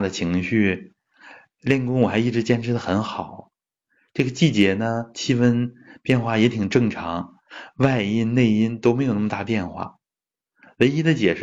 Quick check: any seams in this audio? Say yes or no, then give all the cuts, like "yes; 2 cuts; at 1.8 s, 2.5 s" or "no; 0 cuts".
no; 0 cuts